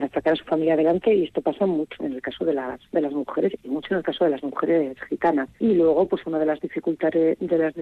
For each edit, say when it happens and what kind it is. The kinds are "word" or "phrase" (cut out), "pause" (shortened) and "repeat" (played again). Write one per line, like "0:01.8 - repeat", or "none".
0:02.0 - word
0:02.9 - pause
0:05.5 - pause